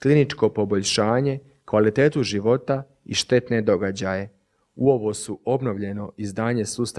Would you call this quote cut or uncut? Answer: uncut